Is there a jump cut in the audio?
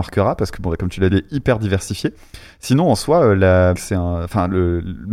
yes; 2 cuts; at 1.1 s, 3.7 s

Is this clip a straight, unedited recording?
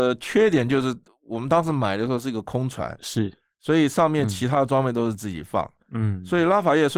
yes; 0 cuts

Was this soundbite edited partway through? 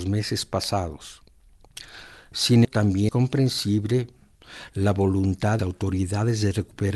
yes; 3 cuts; at 2.6 s, 3.1 s, 5.6 s

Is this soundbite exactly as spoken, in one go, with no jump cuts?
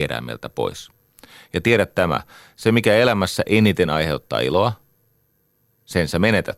yes; 0 cuts

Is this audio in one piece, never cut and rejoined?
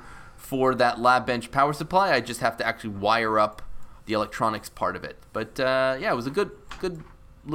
no; 1 cut; at 4.0 s

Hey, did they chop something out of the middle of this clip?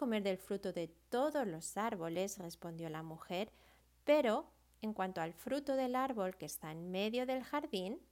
no; 0 cuts

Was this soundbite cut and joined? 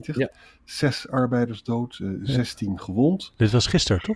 no; 0 cuts

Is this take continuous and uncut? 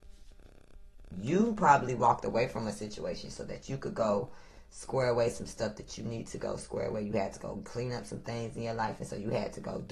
yes; 0 cuts

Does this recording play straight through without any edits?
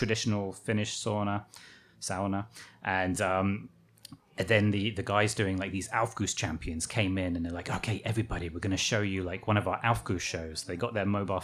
yes; 0 cuts

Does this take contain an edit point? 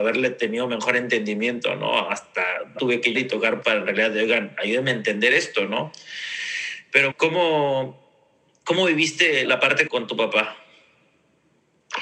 yes; 6 cuts; at 2.8 s, 3.1 s, 3.6 s, 7.1 s, 9.4 s, 9.9 s

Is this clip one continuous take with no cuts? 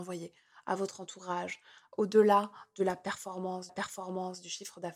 no; 1 cut; at 3.7 s

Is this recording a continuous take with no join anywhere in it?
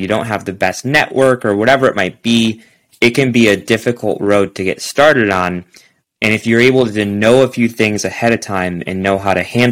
yes; 0 cuts

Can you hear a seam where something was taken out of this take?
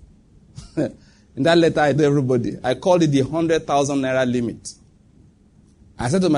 yes; 1 cut; at 2.0 s

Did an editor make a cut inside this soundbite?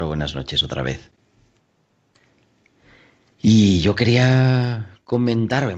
no; 0 cuts

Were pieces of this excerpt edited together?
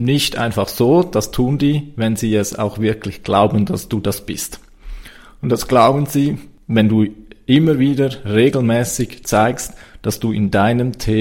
no; 0 cuts

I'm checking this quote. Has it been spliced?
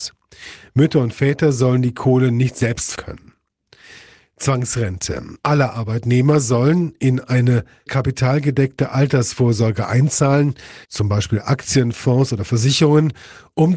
yes; 4 cuts; at 2.9 s, 5.4 s, 7.9 s, 10.8 s

